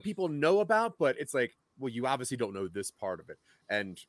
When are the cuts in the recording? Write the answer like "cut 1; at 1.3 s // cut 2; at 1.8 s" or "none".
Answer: none